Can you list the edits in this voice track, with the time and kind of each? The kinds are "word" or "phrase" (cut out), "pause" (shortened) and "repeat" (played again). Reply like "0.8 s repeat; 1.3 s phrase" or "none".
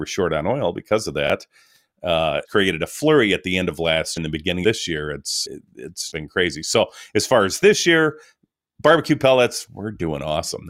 2.4 s word; 4.2 s word; 4.6 s word; 5.5 s word; 6.1 s word; 9.7 s word